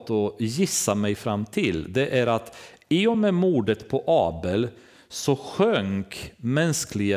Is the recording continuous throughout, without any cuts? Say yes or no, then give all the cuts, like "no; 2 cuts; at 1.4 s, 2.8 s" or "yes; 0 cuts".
yes; 0 cuts